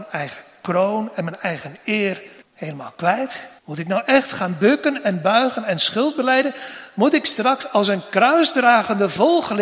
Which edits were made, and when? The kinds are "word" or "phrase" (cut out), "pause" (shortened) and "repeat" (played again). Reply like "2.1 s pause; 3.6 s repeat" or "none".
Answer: 2.4 s pause; 3.6 s pause